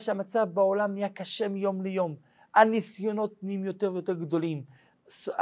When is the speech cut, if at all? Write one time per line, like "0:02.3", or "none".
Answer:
none

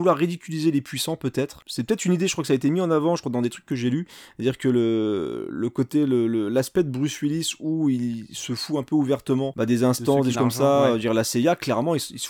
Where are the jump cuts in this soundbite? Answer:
0:10.3

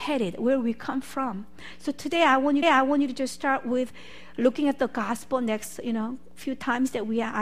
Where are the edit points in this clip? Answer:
0:02.6

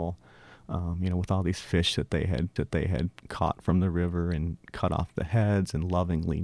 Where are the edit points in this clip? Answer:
0:02.6

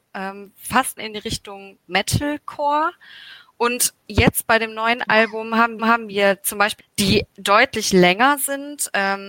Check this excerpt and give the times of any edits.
0:01.0
0:05.8
0:06.8
0:07.3

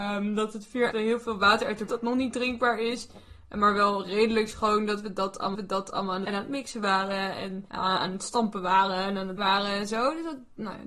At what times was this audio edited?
0:00.9
0:01.9
0:05.5
0:06.3
0:07.7
0:09.4

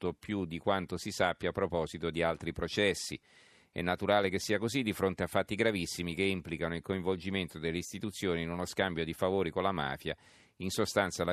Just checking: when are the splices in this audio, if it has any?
none

